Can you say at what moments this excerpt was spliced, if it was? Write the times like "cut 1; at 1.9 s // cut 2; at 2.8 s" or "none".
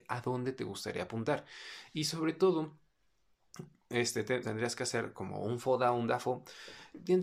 cut 1; at 4.4 s